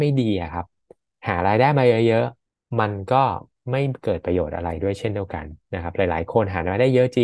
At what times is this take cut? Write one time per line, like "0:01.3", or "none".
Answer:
0:02.4